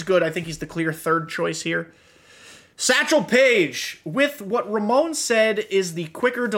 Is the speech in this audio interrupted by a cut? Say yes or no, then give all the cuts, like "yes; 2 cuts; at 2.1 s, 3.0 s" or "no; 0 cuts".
no; 0 cuts